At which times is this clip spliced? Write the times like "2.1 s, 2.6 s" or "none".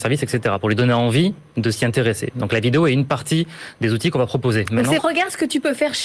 5.0 s